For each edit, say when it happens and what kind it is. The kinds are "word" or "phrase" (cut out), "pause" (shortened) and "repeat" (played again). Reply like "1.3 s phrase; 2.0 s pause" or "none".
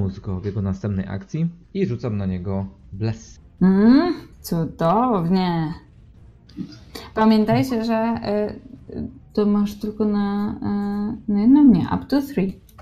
1.6 s pause; 4.3 s pause; 9.2 s pause